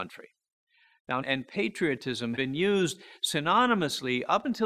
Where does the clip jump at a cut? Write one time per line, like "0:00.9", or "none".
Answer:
0:01.2
0:02.4